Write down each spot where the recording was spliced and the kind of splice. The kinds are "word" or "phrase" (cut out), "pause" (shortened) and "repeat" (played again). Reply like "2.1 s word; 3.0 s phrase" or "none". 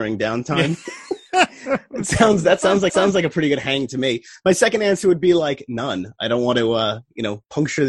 2.9 s repeat